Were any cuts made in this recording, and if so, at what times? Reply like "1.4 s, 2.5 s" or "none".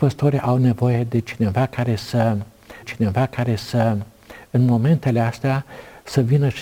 2.8 s